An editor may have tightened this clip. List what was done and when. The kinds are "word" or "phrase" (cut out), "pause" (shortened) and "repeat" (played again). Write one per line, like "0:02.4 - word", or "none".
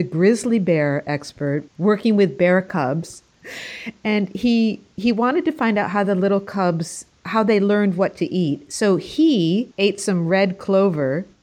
0:01.7 - pause
0:09.7 - pause